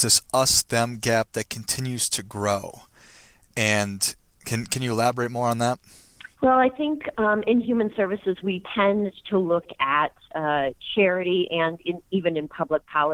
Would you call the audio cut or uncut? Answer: cut